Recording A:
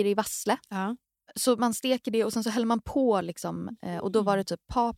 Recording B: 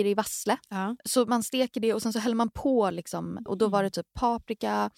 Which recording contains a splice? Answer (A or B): B